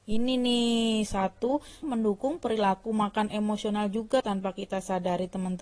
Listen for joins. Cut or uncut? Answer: cut